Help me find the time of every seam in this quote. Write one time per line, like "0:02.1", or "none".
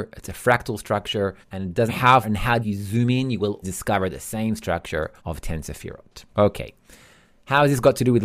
0:01.4
0:01.9
0:02.2
0:02.6
0:03.6
0:05.2
0:06.3